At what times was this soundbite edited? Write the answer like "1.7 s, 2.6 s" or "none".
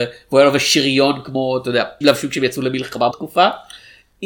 2.0 s, 3.1 s